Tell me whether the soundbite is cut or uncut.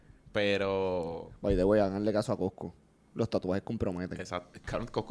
uncut